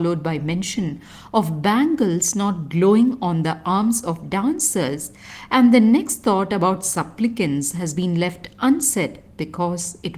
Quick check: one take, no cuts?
yes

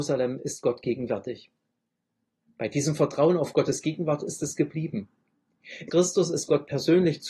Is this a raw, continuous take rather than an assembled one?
no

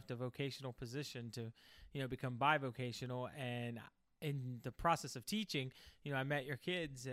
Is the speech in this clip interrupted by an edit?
no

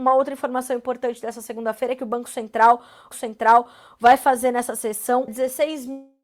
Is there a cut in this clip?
yes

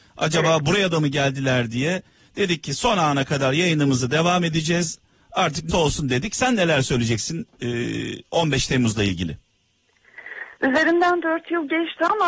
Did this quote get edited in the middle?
yes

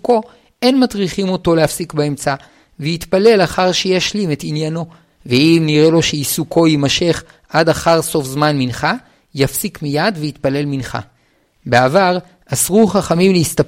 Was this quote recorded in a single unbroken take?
yes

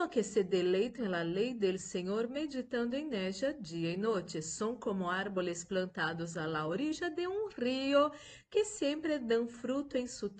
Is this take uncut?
yes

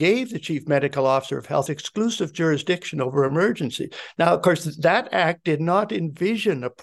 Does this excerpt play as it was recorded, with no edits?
no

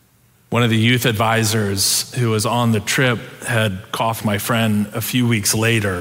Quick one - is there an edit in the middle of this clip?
yes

